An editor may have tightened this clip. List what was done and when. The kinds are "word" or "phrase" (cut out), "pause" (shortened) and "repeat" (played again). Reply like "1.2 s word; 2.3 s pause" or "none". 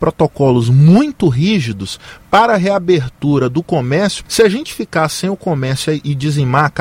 4.3 s word